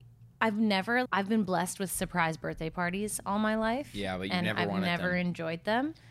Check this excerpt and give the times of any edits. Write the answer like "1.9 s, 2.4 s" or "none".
1.1 s